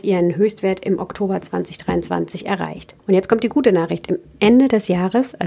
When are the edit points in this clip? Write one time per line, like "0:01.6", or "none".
0:03.0